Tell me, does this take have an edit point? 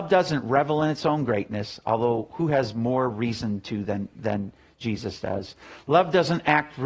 no; 0 cuts

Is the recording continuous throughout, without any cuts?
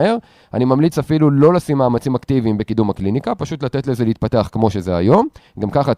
yes; 0 cuts

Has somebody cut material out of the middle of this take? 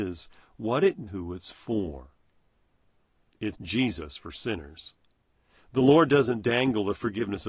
yes; 2 cuts; at 1.1 s, 3.5 s

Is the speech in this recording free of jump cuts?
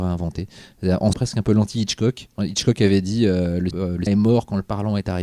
no; 3 cuts; at 1.1 s, 3.7 s, 4.1 s

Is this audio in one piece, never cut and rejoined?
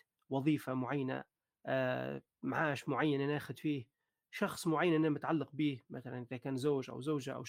yes; 0 cuts

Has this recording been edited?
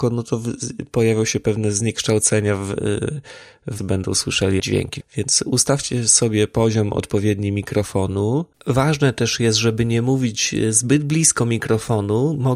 yes; 3 cuts; at 3.8 s, 4.6 s, 8.5 s

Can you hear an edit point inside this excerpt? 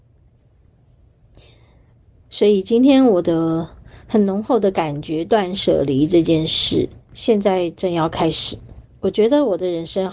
yes; 1 cut; at 7.0 s

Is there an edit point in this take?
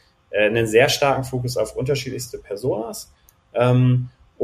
no; 0 cuts

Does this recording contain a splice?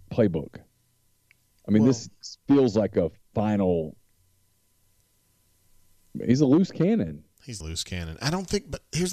yes; 1 cut; at 7.6 s

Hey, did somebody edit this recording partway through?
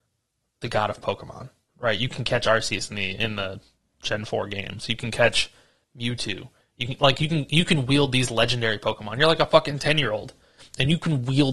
no; 0 cuts

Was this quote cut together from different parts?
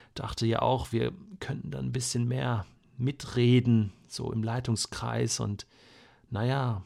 no; 0 cuts

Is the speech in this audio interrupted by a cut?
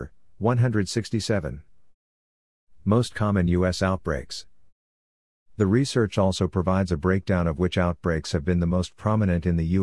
no; 0 cuts

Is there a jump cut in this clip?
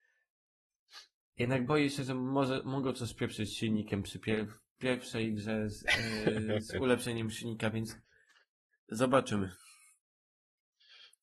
no; 0 cuts

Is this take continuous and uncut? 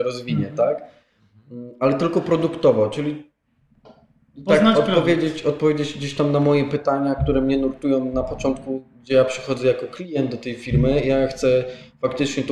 yes; 0 cuts

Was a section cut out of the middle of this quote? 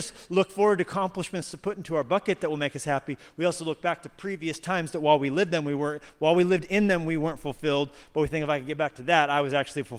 no; 0 cuts

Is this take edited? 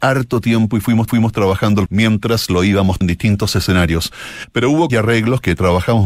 yes; 4 cuts; at 1.1 s, 1.9 s, 3.0 s, 4.9 s

